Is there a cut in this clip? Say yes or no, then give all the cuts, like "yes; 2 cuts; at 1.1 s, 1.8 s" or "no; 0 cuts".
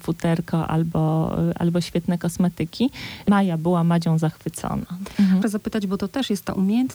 yes; 1 cut; at 5.4 s